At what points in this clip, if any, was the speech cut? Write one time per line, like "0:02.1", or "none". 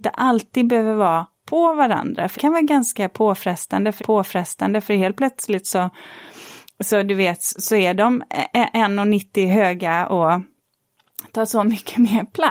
0:02.3
0:04.0
0:07.6